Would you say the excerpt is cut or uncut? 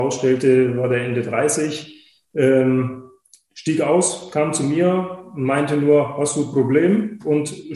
uncut